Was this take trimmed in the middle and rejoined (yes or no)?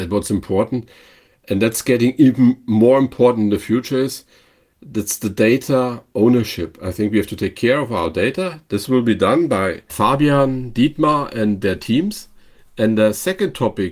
no